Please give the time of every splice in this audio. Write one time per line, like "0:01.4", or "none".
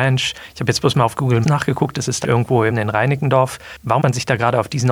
0:01.4
0:02.2
0:02.7
0:04.0